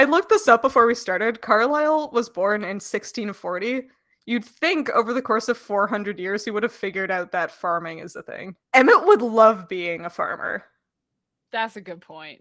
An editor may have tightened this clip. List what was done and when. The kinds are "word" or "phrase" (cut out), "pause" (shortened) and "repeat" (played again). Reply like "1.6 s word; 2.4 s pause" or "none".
none